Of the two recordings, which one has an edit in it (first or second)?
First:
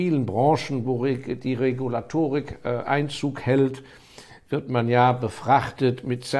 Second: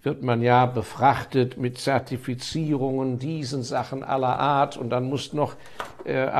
second